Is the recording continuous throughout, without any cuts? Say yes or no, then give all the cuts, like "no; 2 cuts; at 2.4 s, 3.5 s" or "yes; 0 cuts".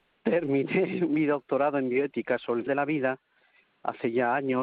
no; 1 cut; at 2.7 s